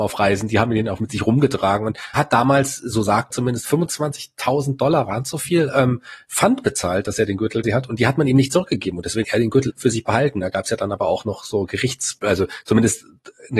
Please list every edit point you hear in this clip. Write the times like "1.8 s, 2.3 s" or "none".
1.0 s, 2.2 s, 3.3 s, 7.6 s, 9.2 s, 9.7 s, 12.2 s

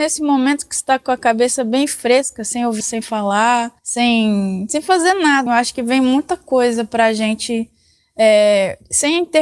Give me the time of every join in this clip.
2.8 s, 3.8 s, 5.5 s

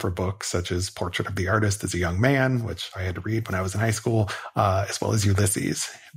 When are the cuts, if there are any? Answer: none

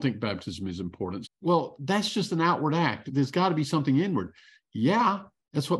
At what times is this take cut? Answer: 1.2 s, 3.1 s

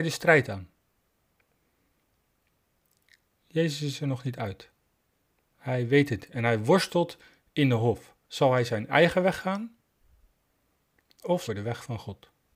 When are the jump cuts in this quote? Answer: 6.2 s, 8.2 s, 11.5 s

